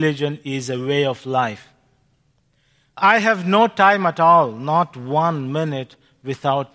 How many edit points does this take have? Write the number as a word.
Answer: zero